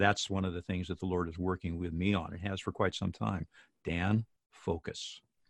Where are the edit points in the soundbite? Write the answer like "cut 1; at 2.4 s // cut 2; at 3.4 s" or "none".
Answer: none